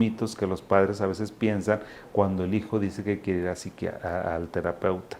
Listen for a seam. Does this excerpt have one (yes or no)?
no